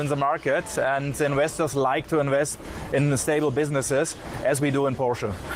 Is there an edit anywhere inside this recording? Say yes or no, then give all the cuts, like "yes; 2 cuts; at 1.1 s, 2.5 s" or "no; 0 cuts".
no; 0 cuts